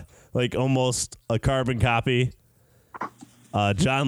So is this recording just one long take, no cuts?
yes; 0 cuts

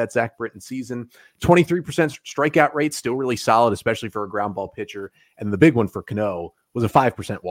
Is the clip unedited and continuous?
yes; 0 cuts

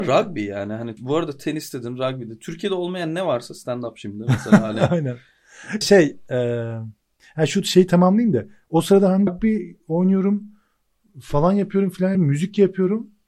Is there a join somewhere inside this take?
yes; 4 cuts; at 1.0 s, 5.8 s, 9.3 s, 12.1 s

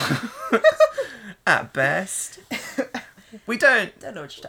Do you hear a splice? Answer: no; 0 cuts

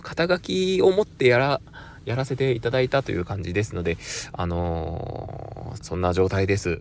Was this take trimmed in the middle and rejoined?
yes; 1 cut; at 5.8 s

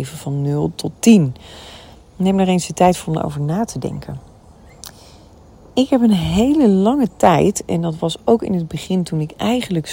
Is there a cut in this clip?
no; 0 cuts

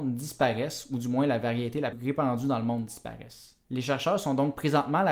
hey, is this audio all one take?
no; 1 cut; at 1.9 s

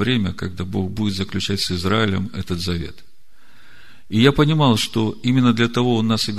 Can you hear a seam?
no; 0 cuts

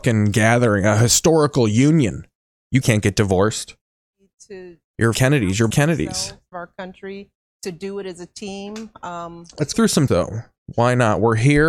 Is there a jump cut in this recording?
yes; 6 cuts; at 2.8 s, 5.1 s, 5.7 s, 6.5 s, 9.7 s, 10.1 s

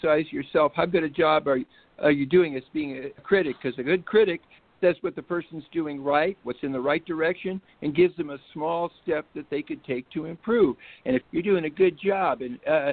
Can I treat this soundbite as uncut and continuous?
no; 2 cuts; at 3.2 s, 11.2 s

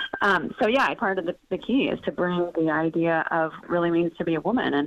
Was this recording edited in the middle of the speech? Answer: yes; 3 cuts; at 1.0 s, 2.5 s, 3.6 s

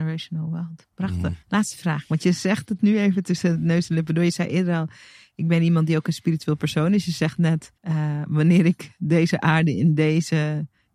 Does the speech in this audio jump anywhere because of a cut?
yes; 2 cuts; at 1.4 s, 7.8 s

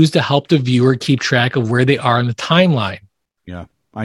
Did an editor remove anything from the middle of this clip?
no; 0 cuts

